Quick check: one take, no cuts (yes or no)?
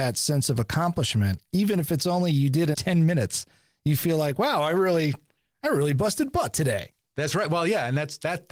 no